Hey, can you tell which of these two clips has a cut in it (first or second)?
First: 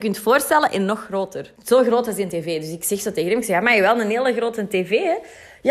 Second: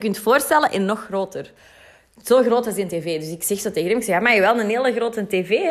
first